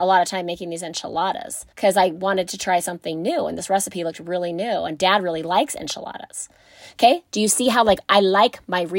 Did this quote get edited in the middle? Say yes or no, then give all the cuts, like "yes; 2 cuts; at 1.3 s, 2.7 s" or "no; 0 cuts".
yes; 1 cut; at 1.7 s